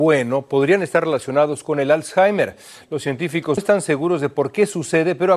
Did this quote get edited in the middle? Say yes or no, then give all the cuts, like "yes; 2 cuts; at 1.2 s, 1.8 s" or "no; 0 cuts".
yes; 1 cut; at 3.6 s